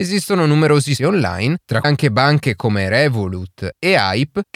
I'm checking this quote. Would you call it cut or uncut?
cut